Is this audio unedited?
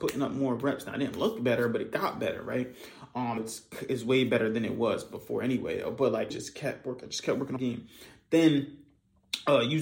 no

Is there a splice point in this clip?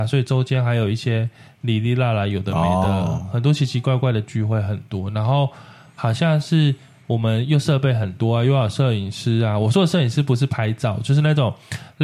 no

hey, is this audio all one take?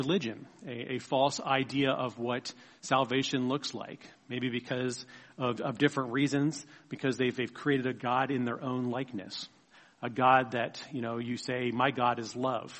yes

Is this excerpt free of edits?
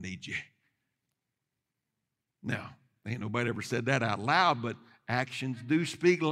yes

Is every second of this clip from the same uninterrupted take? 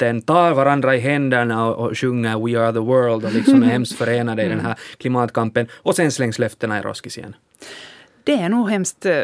yes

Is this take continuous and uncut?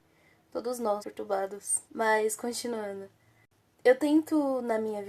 no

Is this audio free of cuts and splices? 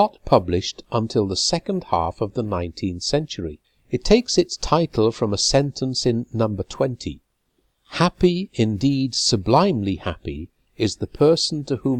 no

